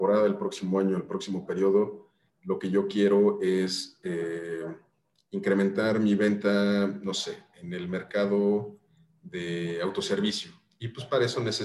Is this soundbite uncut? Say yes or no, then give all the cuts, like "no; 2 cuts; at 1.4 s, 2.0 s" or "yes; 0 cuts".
yes; 0 cuts